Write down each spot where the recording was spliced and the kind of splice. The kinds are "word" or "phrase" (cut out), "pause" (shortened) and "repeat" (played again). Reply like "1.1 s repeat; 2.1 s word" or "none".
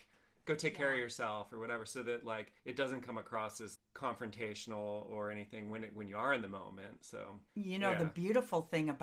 2.6 s pause; 3.8 s word; 7.5 s pause